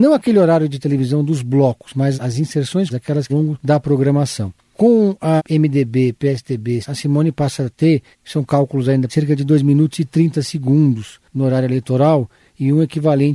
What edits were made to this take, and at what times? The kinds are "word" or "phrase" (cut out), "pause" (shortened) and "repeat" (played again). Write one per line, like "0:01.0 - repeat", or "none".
0:02.1 - word
0:02.9 - word
0:03.3 - phrase
0:05.4 - word
0:06.8 - word
0:08.1 - pause
0:09.1 - word